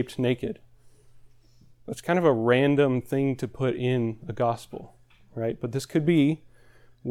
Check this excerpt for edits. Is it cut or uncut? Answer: uncut